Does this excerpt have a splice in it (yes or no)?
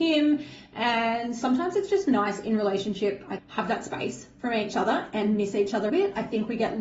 yes